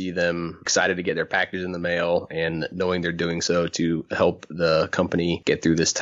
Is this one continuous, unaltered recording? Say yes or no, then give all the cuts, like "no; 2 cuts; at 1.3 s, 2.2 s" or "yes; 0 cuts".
yes; 0 cuts